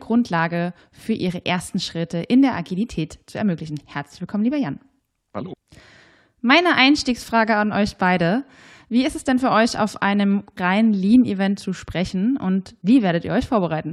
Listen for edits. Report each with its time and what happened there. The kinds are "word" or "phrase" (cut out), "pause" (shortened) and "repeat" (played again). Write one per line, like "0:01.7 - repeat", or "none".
0:10.6 - word